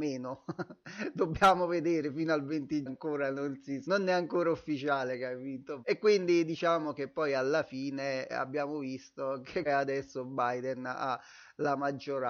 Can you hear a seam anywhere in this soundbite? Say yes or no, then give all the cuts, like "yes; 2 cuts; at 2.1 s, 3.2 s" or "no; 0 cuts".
yes; 5 cuts; at 2.9 s, 3.8 s, 5.8 s, 8.3 s, 9.7 s